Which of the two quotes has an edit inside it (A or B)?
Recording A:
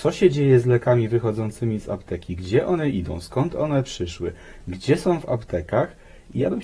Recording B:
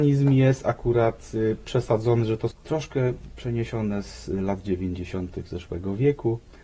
B